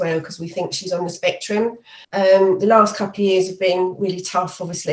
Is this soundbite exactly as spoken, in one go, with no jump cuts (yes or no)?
no